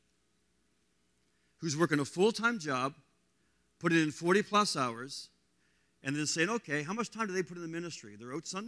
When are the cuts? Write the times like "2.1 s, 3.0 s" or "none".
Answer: none